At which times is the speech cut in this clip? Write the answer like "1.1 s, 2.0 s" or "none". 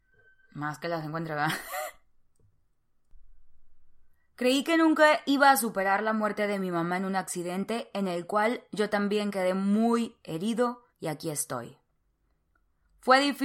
4.1 s, 10.9 s